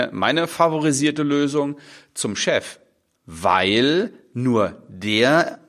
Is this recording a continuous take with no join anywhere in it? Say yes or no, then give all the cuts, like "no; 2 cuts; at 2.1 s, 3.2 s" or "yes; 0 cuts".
yes; 0 cuts